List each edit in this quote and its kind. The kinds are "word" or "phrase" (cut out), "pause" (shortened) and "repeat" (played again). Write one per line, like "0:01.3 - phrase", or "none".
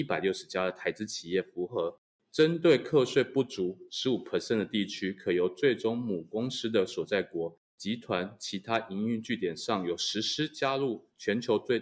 none